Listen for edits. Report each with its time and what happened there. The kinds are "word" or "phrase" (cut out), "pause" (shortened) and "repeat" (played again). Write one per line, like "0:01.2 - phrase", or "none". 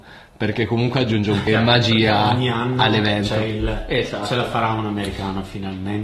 0:01.5 - word